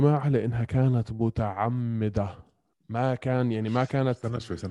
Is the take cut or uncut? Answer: uncut